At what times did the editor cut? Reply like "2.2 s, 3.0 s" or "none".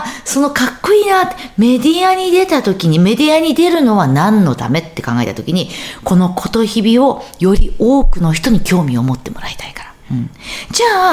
10.0 s